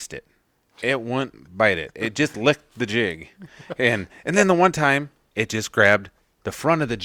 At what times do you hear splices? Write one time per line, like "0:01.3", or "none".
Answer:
none

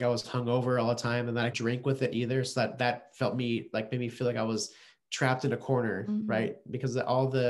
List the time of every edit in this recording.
0:01.5

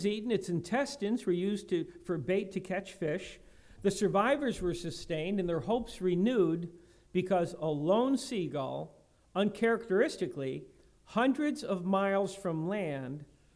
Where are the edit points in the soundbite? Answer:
none

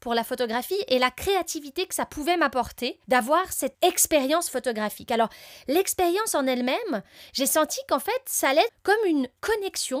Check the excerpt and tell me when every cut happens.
0:03.0
0:03.7
0:08.7

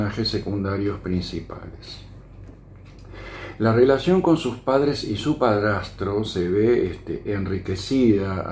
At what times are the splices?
none

